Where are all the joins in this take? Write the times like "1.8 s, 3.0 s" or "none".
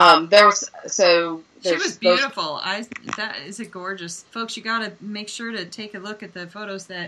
4.3 s